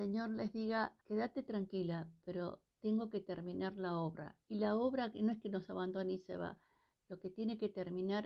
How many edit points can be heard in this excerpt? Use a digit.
3